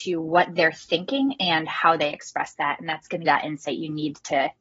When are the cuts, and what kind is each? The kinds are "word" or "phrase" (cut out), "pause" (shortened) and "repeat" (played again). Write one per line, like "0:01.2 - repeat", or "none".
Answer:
0:03.2 - phrase